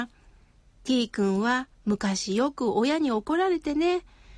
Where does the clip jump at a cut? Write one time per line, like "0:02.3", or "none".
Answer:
0:01.7